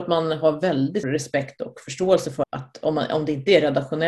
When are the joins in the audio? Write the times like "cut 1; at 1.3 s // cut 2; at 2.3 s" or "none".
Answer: cut 1; at 1.0 s // cut 2; at 2.4 s